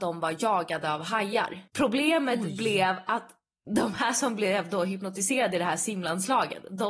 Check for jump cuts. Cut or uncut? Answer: cut